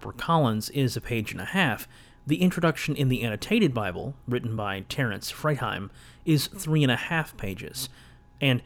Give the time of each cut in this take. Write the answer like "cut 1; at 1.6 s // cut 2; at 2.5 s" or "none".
none